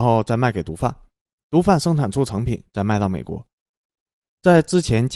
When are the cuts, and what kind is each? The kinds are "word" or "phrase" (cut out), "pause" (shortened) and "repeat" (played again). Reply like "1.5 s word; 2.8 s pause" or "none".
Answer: none

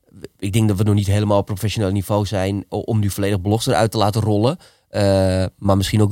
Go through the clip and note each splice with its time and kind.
2.7 s word

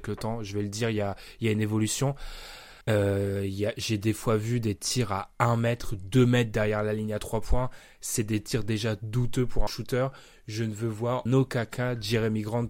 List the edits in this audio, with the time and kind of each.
2.8 s pause; 9.7 s phrase; 11.3 s word

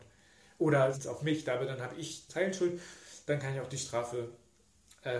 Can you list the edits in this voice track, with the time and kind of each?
0.9 s word; 2.3 s word

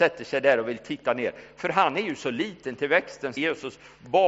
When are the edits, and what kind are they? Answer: 3.4 s phrase

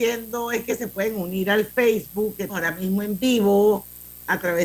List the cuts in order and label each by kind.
2.5 s word

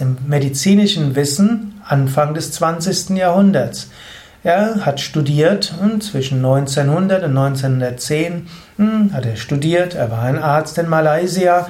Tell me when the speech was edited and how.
none

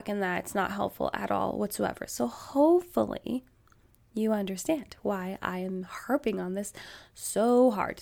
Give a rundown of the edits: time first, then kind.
none

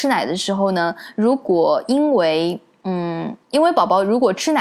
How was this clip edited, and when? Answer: 3.4 s pause

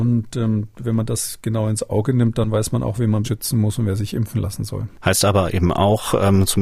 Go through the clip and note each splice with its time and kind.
3.2 s word

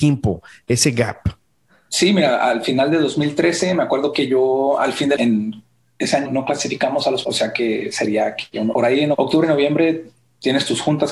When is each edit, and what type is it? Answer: 5.2 s word; 6.3 s word; 7.2 s word; 8.7 s word; 9.1 s word

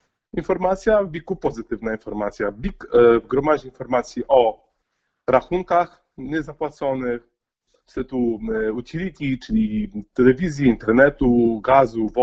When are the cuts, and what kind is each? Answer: none

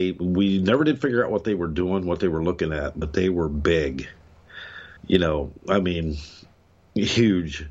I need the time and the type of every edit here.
5.0 s pause

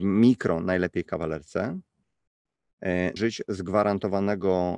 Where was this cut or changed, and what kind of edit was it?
3.2 s word

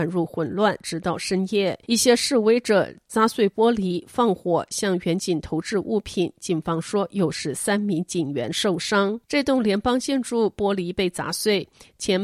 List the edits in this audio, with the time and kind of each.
1.8 s pause; 9.2 s pause

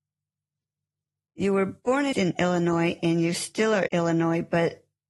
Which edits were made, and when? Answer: 2.1 s word; 3.9 s word

